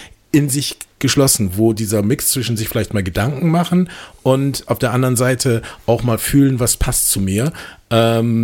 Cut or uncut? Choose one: uncut